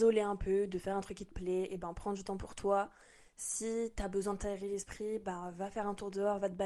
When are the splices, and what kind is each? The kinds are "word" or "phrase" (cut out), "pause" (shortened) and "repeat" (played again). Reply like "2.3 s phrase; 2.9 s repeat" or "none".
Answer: none